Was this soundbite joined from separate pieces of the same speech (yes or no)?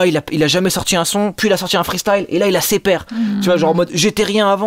no